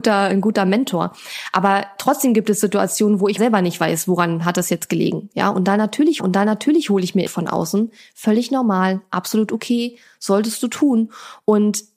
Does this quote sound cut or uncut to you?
cut